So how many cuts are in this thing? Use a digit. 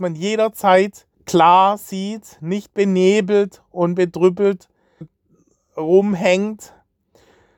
2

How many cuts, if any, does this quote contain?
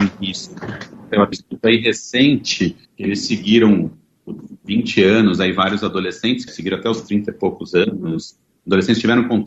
3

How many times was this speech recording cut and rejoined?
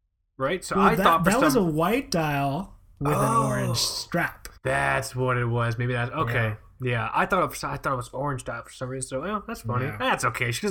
1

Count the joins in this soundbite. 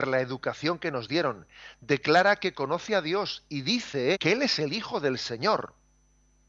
1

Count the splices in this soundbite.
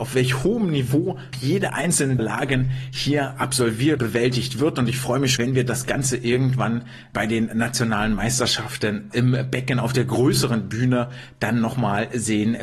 6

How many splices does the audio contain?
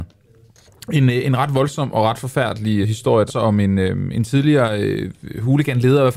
2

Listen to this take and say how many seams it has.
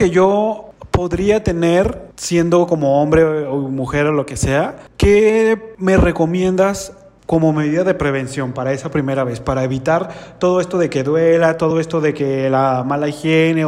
0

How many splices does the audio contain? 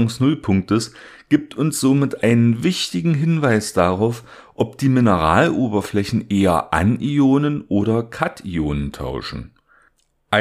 0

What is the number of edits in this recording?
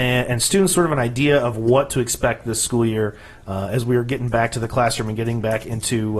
0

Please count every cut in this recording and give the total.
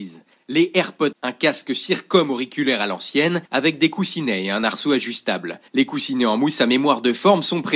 3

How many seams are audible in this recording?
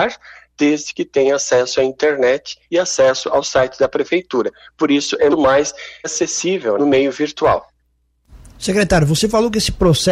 3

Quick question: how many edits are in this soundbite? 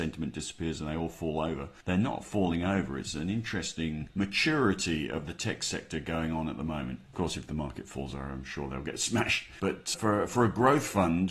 1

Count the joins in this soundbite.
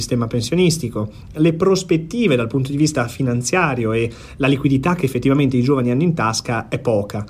1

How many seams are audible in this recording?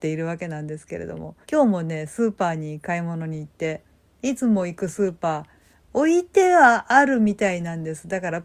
1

